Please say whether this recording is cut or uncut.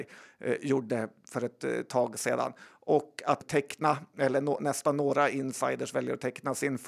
cut